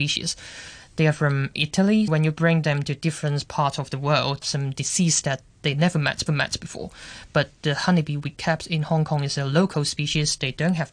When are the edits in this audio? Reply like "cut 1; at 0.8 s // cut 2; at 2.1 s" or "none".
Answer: cut 1; at 2.1 s // cut 2; at 4.4 s // cut 3; at 6.3 s